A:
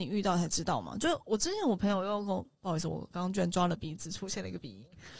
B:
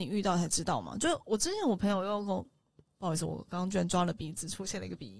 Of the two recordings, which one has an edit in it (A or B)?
A